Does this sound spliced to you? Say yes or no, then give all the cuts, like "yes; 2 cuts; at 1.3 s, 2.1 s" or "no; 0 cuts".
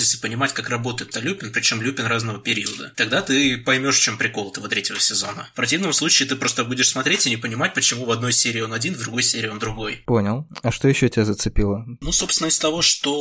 yes; 1 cut; at 1.1 s